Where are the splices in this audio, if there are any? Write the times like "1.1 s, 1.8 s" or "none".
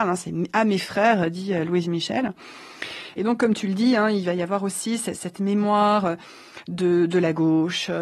none